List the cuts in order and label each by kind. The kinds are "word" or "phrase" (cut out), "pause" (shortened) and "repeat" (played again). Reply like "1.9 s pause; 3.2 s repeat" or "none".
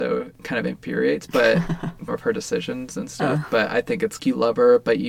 1.3 s word; 2.1 s word; 4.2 s word